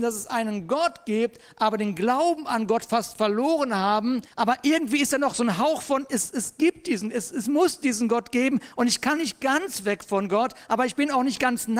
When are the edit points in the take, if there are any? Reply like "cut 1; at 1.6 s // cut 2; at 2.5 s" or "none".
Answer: cut 1; at 4.3 s